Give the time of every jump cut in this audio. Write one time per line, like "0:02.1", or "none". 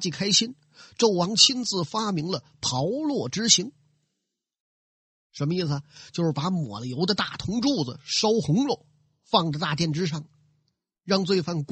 none